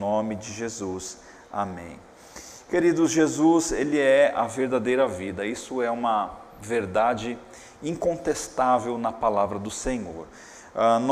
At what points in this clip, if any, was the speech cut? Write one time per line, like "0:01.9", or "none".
none